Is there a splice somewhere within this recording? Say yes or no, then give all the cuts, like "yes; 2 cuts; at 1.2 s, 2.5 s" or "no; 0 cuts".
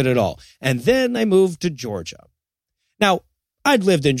no; 0 cuts